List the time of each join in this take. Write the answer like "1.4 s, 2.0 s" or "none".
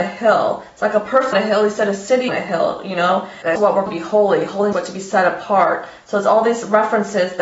1.3 s, 2.3 s, 3.6 s, 3.9 s, 4.7 s